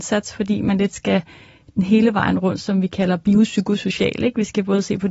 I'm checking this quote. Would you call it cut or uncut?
uncut